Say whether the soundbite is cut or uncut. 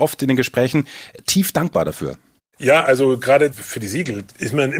uncut